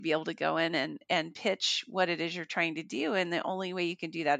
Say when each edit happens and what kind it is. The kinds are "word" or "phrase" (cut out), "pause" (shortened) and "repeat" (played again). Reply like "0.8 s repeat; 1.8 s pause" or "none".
none